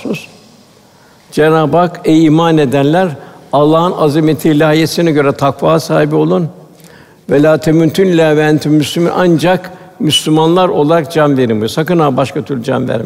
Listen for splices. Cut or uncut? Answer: uncut